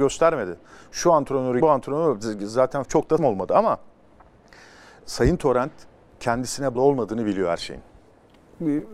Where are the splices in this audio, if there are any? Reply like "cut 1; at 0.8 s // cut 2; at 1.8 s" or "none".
cut 1; at 1.6 s // cut 2; at 2.8 s // cut 3; at 3.2 s // cut 4; at 5.0 s // cut 5; at 6.8 s